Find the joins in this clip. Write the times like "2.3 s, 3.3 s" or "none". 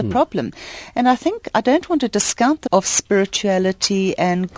2.7 s